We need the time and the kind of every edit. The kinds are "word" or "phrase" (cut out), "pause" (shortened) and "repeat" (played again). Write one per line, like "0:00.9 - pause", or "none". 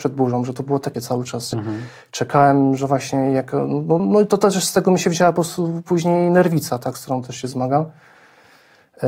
0:00.9 - word
0:01.5 - word
0:04.0 - word